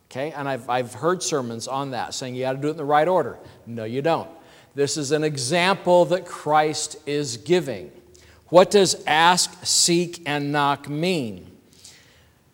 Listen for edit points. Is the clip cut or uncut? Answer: uncut